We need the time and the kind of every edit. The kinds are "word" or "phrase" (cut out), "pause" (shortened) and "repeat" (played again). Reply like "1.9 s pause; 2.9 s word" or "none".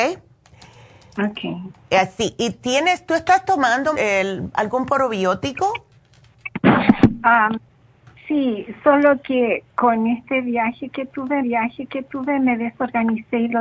3.9 s word; 11.4 s repeat